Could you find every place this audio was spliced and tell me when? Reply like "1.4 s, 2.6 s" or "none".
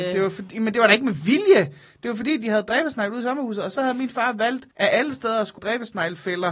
4.7 s, 5.6 s